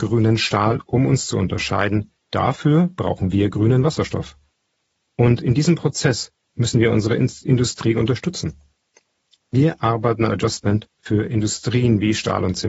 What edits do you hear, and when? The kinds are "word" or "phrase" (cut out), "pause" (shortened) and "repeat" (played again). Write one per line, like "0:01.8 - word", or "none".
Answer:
0:02.2 - pause
0:10.3 - phrase